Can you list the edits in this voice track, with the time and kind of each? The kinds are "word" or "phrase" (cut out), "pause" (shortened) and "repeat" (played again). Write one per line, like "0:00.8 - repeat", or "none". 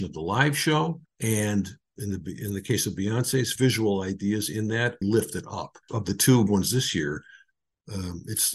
0:01.1 - pause
0:03.6 - phrase
0:05.0 - word
0:05.8 - pause
0:06.5 - word